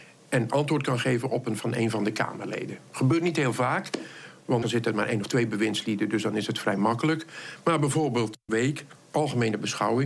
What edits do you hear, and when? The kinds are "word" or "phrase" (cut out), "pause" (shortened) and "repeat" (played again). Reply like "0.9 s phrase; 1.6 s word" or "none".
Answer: 1.6 s word; 4.6 s word; 8.5 s word